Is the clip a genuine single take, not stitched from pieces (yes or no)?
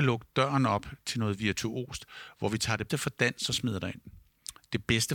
no